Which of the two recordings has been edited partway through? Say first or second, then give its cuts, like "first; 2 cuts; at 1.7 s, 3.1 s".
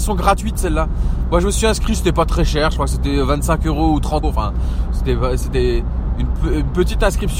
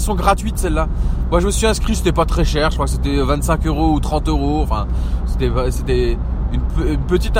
first; 1 cut; at 4.2 s